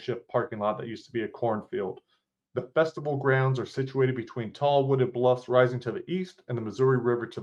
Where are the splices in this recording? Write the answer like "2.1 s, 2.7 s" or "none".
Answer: none